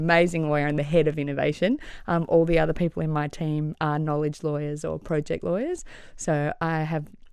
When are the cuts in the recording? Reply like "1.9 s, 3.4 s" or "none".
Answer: none